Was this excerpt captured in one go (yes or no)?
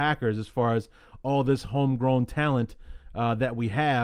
yes